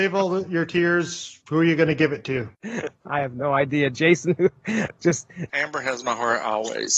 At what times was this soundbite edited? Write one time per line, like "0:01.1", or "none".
none